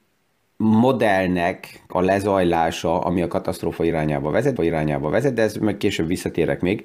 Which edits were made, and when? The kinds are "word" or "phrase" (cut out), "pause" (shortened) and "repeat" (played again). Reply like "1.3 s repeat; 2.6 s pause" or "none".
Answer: 1.9 s word; 4.6 s repeat